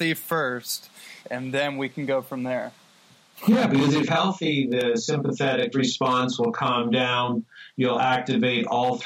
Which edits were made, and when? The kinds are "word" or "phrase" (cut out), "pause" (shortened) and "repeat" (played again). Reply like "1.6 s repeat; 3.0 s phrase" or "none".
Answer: 1.2 s pause; 4.1 s word; 5.7 s word

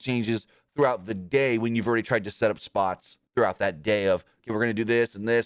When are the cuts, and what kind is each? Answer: 3.3 s pause

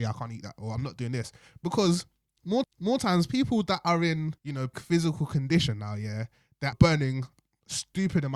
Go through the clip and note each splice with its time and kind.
2.6 s repeat; 4.4 s pause; 4.7 s word; 6.7 s word

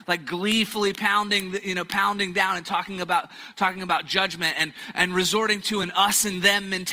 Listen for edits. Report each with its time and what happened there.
none

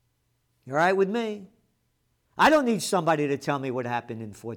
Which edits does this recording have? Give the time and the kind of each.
none

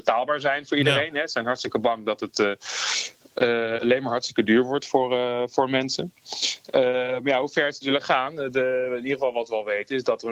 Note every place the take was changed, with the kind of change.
none

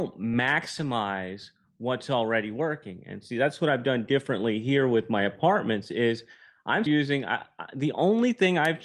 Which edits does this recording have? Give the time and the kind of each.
6.9 s word

